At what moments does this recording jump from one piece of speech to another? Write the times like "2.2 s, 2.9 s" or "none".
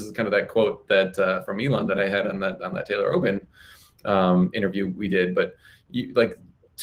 none